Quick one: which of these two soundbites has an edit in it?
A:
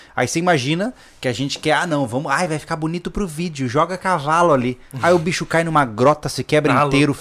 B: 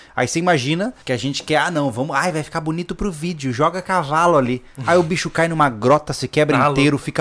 B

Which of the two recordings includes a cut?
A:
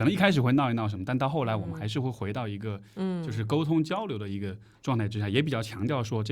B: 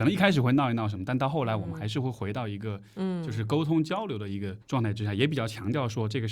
B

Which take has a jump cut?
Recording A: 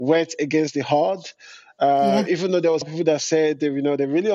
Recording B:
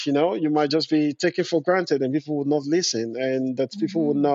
A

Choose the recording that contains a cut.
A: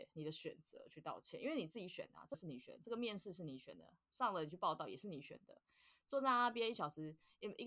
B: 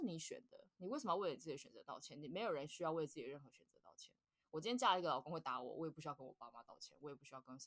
A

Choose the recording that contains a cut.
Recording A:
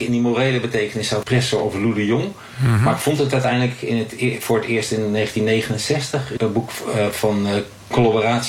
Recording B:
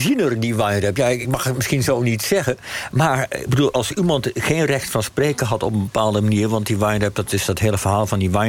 A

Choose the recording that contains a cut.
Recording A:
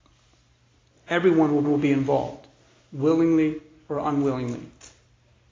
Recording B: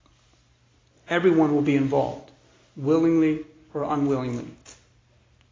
A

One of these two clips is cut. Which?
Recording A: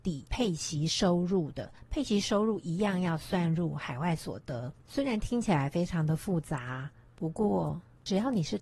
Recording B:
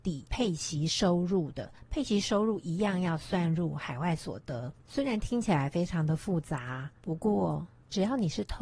B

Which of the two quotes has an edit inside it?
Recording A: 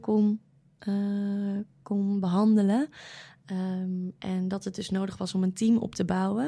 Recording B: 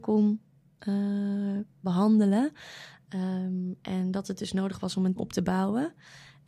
B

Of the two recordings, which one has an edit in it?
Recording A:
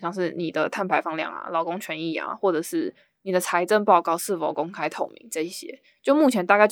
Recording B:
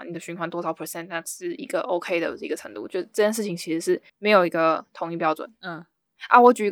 B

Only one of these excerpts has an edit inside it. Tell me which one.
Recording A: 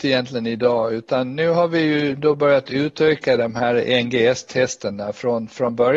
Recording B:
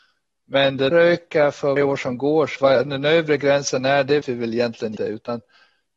B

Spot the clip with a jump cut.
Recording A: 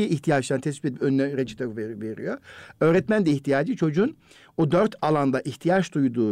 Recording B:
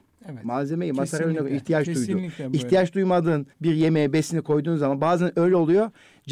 B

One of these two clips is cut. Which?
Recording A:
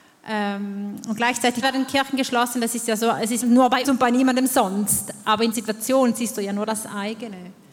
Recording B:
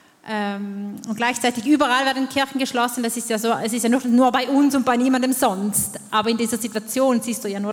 A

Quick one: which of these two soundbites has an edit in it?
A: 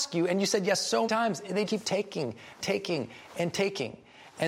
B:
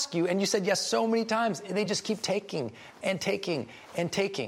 A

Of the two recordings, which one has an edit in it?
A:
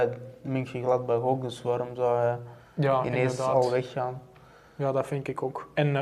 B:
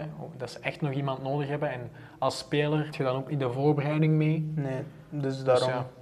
B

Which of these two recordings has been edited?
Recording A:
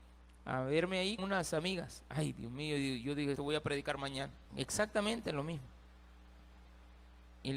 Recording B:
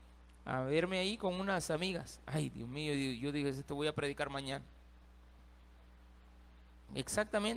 A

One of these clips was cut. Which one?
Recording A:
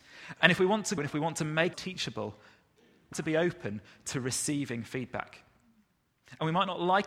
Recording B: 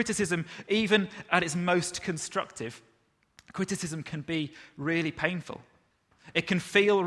A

